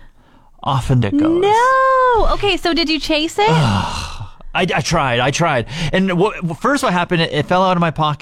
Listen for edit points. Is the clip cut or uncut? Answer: cut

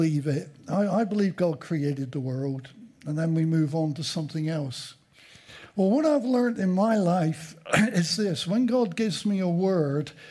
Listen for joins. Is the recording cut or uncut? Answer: uncut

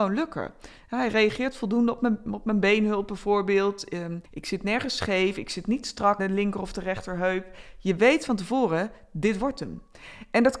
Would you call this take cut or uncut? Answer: cut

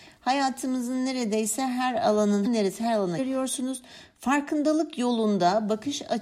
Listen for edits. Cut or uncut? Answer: cut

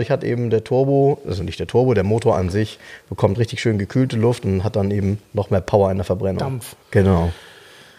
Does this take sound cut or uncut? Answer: cut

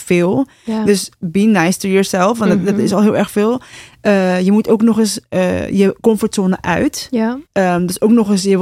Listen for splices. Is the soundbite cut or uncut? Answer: cut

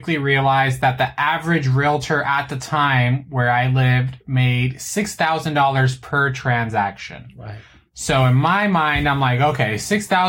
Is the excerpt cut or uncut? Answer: uncut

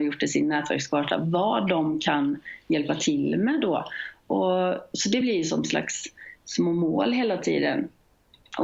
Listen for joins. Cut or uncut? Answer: uncut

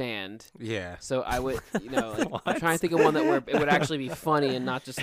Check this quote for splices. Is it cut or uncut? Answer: uncut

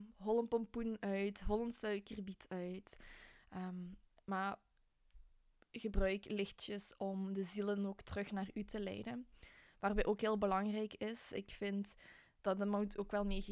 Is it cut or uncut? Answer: uncut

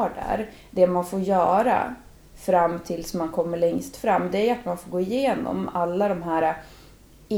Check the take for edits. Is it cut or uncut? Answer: uncut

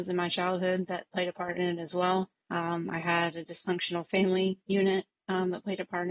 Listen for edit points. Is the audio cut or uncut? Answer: cut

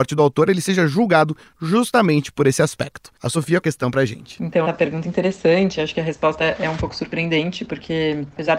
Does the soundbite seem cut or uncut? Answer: cut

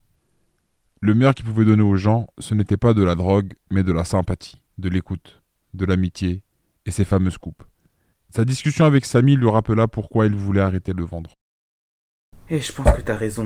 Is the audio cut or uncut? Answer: cut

